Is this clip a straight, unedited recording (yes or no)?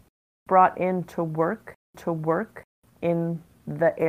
no